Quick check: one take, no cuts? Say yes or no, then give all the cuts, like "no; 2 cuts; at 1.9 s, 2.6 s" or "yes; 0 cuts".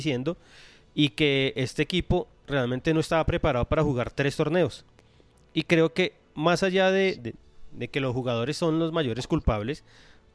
yes; 0 cuts